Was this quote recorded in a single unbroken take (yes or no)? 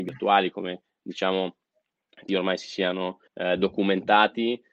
no